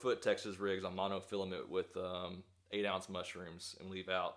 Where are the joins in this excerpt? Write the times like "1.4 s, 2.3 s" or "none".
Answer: none